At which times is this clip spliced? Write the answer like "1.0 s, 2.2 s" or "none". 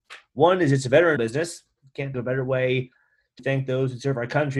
1.2 s, 2.1 s, 3.4 s